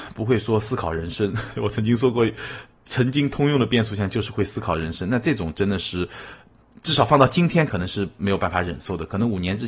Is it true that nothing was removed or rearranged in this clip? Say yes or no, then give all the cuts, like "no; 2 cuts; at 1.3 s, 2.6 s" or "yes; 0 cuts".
yes; 0 cuts